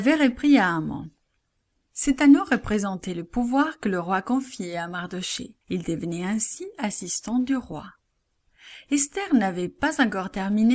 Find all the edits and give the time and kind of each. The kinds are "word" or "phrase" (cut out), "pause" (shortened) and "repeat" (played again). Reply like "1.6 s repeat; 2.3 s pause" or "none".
5.6 s pause

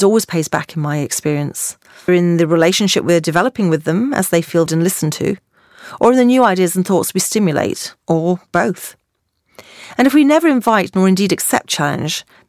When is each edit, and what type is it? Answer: 2.1 s word; 4.7 s word; 8.0 s pause

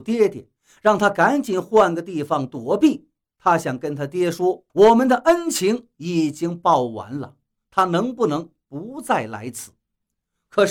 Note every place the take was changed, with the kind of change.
4.7 s pause

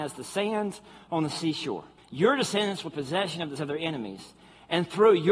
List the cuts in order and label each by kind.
2.0 s pause; 2.9 s word; 3.6 s word

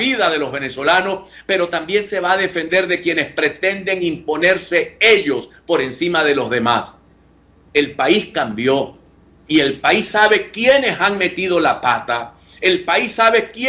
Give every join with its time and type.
none

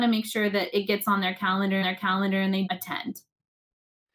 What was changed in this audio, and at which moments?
1.8 s repeat; 2.7 s word

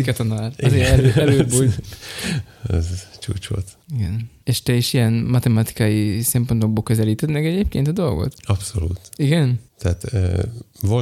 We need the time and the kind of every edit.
3.8 s pause

